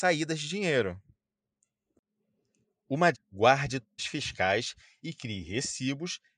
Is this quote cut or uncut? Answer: cut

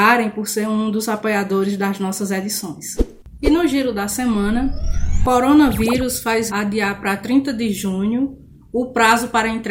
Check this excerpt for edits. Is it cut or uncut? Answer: cut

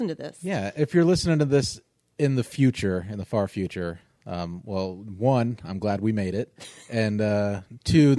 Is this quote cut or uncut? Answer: uncut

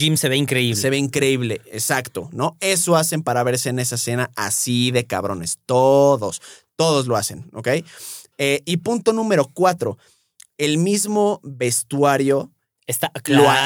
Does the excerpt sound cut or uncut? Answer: uncut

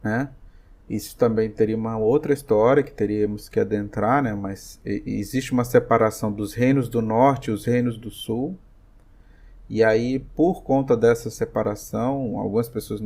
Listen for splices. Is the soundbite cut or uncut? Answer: uncut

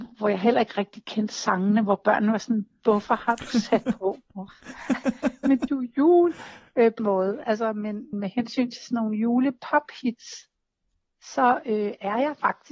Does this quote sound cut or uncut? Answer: cut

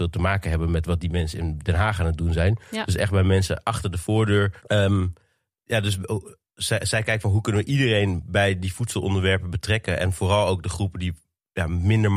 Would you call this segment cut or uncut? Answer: cut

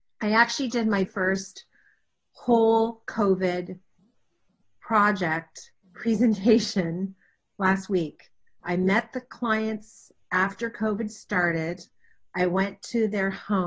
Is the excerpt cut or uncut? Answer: cut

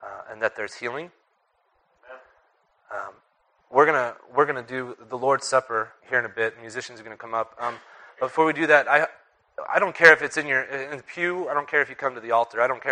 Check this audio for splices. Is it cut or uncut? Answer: cut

